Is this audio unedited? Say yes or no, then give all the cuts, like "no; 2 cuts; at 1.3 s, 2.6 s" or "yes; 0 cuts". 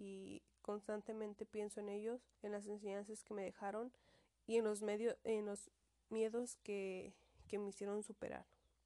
no; 1 cut; at 2.3 s